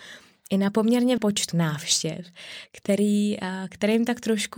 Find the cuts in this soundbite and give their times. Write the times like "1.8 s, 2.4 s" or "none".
1.2 s, 1.5 s